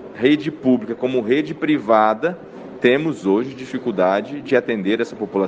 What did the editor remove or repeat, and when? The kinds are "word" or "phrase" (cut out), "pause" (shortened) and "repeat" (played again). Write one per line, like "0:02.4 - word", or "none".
none

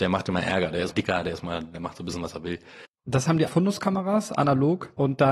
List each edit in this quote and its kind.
0:00.9 - word
0:01.7 - word
0:02.9 - pause
0:03.5 - phrase

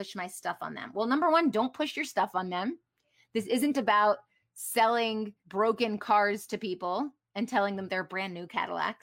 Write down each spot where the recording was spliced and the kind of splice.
0:05.4 - pause

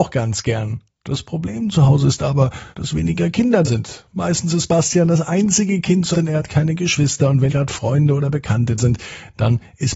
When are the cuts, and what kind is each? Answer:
0:00.9 - pause
0:02.7 - pause
0:03.6 - word
0:06.1 - word
0:07.5 - word
0:08.8 - word

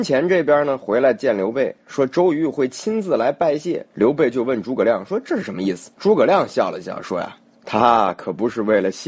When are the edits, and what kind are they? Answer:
0:03.9 - pause
0:05.9 - pause
0:07.5 - pause

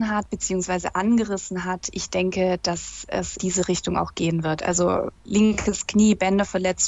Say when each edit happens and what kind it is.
0:03.4 - word

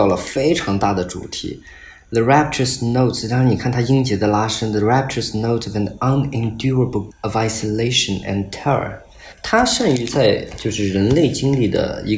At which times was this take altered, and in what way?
0:07.1 - word

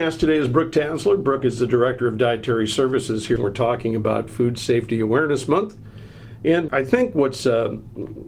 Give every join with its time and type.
0:03.4 - phrase
0:06.7 - word

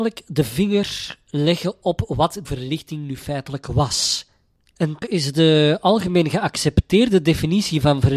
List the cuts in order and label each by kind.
0:02.4 - word
0:05.0 - word

